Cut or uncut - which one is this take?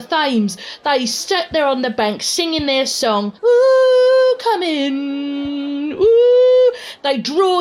cut